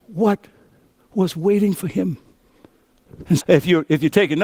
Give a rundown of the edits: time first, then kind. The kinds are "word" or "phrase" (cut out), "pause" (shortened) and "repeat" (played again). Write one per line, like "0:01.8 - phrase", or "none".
0:03.4 - word